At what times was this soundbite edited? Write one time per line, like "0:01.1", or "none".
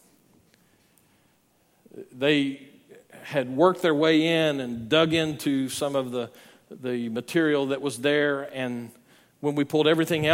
none